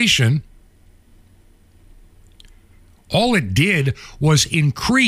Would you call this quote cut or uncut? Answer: uncut